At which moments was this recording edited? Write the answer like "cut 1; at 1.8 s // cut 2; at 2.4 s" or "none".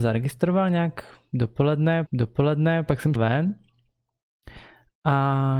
cut 1; at 2.1 s // cut 2; at 3.2 s